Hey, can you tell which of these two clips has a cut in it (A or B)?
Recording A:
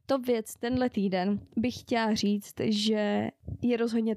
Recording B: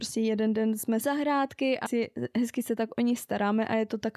B